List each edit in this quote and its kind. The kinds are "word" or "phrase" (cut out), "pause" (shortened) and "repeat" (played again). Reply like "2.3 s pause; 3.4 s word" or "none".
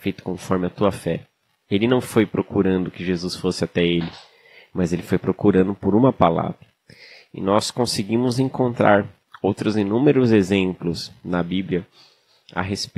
none

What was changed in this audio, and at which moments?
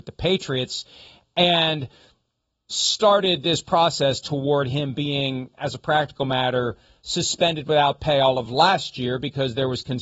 none

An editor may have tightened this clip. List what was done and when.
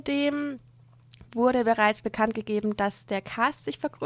1.3 s pause

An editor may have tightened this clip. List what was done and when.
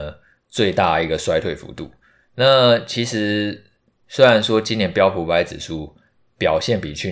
none

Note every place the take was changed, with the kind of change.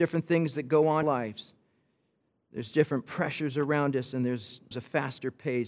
1.0 s phrase; 4.7 s word

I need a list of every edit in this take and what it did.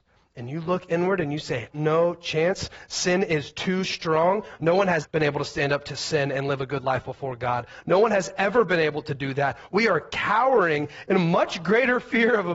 1.7 s phrase; 5.0 s word

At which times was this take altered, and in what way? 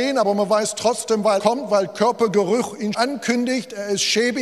1.4 s word; 2.9 s word

